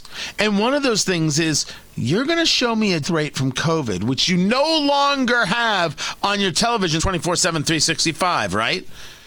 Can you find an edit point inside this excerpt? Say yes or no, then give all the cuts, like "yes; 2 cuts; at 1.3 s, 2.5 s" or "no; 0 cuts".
yes; 2 cuts; at 3.0 s, 7.0 s